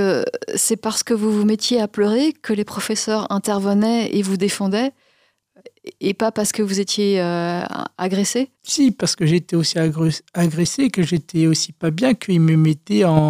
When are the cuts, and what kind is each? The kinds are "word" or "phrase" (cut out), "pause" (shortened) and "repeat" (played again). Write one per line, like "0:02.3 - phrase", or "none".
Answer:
0:08.5 - pause